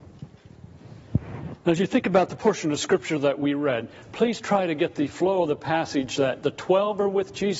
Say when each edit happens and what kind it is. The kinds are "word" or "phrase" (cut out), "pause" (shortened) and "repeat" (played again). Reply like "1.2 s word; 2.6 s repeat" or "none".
none